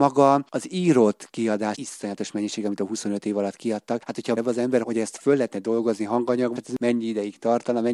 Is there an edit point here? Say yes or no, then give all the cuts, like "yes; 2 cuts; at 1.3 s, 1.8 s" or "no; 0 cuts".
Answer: yes; 4 cuts; at 1.7 s, 4.4 s, 4.8 s, 6.6 s